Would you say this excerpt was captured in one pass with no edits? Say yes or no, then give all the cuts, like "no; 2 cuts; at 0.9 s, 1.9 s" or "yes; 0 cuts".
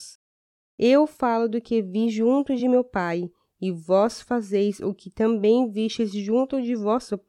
yes; 0 cuts